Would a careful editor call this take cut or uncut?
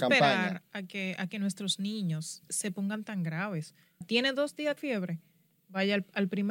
cut